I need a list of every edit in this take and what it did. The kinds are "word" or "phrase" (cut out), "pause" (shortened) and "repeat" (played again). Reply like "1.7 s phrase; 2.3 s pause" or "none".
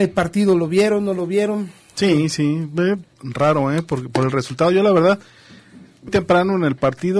3.1 s word; 6.1 s word